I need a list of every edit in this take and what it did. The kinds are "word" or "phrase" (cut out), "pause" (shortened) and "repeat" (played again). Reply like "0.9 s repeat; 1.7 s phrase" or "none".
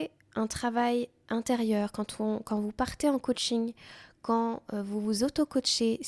none